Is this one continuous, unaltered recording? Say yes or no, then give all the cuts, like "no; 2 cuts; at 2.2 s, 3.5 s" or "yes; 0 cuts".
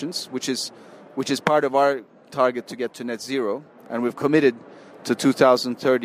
yes; 0 cuts